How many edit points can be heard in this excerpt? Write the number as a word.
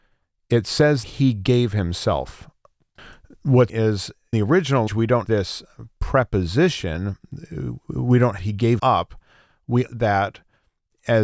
eight